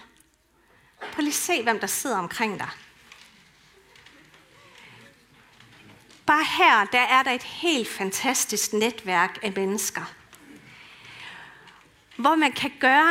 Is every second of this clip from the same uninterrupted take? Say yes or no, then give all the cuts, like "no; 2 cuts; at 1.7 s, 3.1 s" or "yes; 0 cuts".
yes; 0 cuts